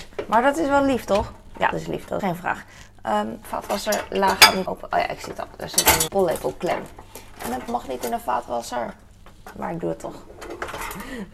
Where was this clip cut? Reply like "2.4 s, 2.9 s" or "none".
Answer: 1.7 s, 2.2 s, 3.4 s, 4.7 s, 6.1 s, 7.7 s